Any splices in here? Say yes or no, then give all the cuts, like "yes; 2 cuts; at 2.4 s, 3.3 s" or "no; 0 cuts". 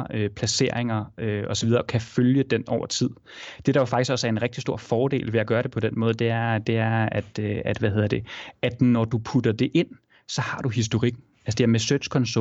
no; 0 cuts